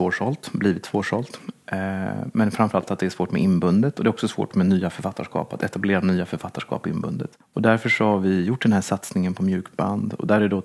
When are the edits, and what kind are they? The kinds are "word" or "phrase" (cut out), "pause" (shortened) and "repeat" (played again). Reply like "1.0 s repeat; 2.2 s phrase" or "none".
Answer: 7.4 s pause